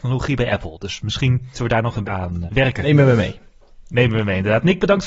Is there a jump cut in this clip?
yes; 3 cuts; at 1.5 s, 2.0 s, 2.5 s

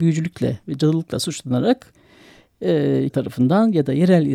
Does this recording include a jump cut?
yes; 1 cut; at 3.1 s

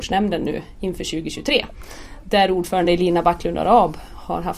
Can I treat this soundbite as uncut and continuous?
yes; 0 cuts

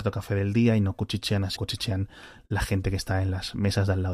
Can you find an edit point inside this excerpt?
yes; 1 cut; at 1.6 s

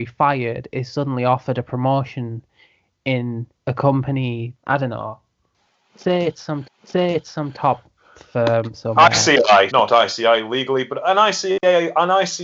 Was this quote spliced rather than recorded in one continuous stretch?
yes; 4 cuts; at 3.6 s, 4.5 s, 6.6 s, 9.7 s

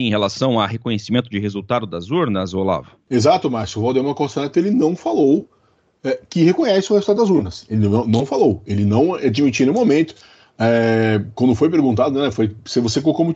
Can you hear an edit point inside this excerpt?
no; 0 cuts

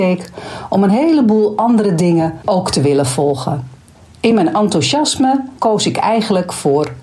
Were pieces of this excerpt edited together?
no; 0 cuts

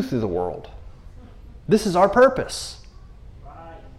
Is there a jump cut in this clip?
no; 0 cuts

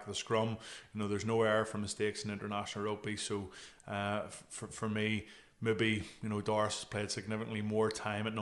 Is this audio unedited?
yes; 0 cuts

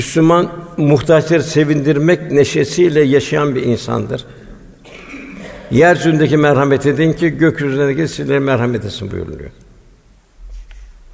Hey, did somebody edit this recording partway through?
no; 0 cuts

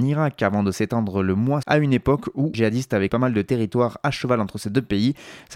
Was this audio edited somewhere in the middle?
yes; 3 cuts; at 1.6 s, 2.5 s, 3.1 s

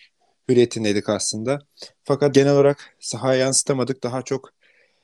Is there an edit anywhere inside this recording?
yes; 1 cut; at 2.3 s

